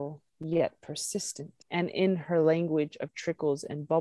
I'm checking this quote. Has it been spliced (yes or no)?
yes